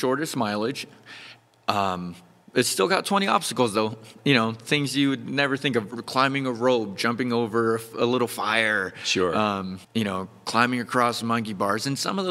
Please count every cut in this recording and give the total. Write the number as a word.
one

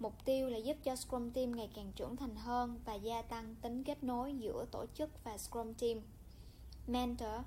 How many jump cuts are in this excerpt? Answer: zero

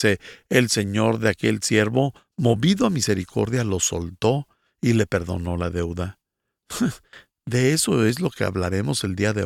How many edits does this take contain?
zero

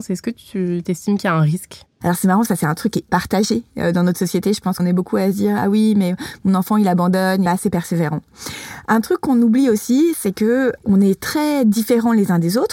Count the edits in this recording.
five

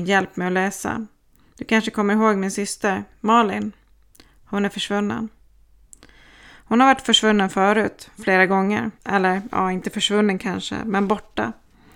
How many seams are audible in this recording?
one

